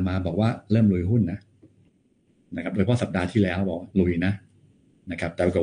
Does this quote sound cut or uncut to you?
cut